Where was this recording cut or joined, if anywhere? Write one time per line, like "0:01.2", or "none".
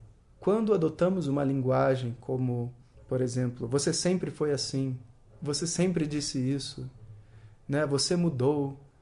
none